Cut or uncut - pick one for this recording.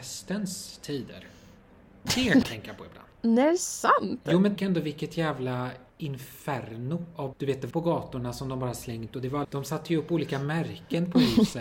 cut